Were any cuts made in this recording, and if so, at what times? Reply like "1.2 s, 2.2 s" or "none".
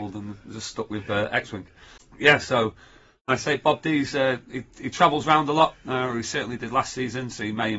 none